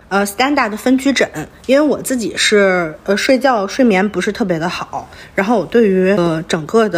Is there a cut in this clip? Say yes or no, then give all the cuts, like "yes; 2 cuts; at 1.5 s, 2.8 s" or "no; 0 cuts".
no; 0 cuts